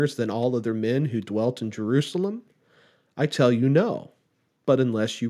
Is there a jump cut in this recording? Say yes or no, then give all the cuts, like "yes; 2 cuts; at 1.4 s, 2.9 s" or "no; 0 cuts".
no; 0 cuts